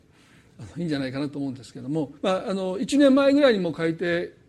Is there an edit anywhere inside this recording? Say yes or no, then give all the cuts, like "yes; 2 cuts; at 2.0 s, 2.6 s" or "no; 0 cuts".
yes; 1 cut; at 2.2 s